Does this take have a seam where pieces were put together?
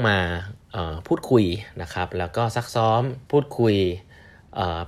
yes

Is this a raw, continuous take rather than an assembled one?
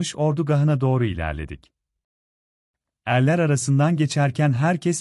yes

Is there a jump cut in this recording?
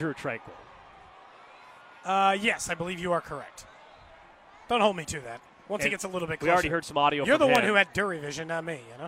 no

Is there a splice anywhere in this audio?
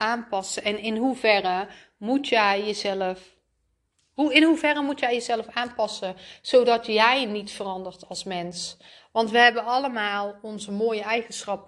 no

